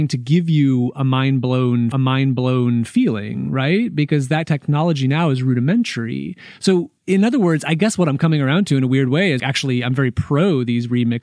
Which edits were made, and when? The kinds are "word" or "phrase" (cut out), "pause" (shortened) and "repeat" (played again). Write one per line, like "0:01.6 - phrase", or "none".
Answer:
0:01.9 - repeat
0:09.4 - word